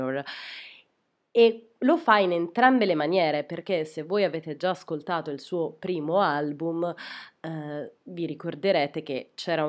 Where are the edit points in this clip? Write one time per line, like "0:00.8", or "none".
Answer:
none